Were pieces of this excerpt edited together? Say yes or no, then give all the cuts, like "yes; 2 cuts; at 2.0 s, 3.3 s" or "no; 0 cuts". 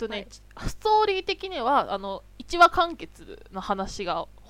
yes; 1 cut; at 2.3 s